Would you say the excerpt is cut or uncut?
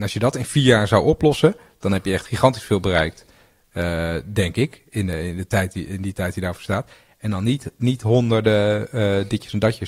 uncut